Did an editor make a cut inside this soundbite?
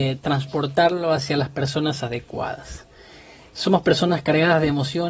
no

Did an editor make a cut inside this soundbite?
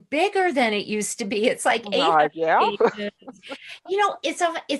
no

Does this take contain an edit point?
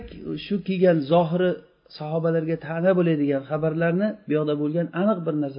no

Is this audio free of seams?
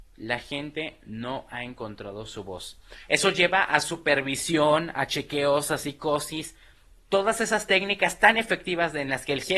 yes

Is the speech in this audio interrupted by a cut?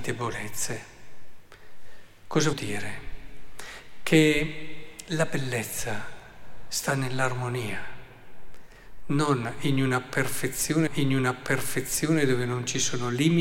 yes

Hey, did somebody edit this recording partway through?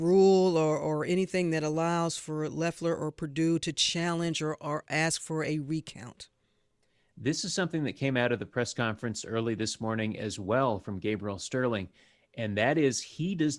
no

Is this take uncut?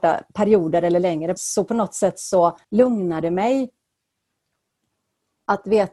no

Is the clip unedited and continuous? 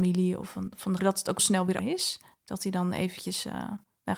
no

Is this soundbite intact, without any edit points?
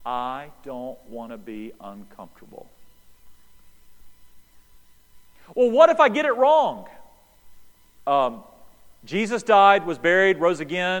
yes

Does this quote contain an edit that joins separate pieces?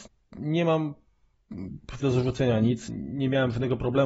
yes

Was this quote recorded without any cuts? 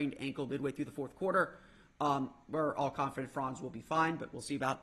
yes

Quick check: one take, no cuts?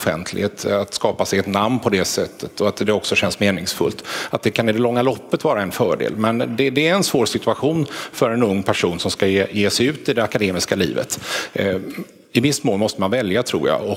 yes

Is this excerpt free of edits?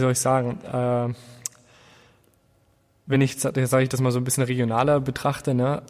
yes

